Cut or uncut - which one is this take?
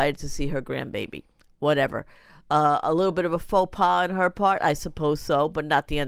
uncut